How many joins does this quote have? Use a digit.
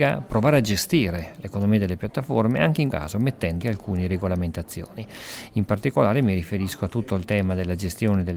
2